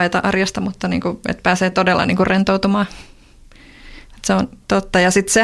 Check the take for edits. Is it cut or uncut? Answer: uncut